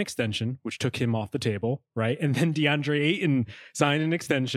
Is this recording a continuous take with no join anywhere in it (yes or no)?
yes